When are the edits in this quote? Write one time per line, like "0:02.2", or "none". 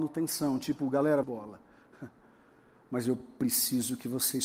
0:01.2